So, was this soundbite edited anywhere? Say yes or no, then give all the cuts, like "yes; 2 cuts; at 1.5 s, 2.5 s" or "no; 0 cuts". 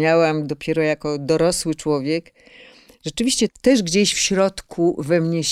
yes; 1 cut; at 3.5 s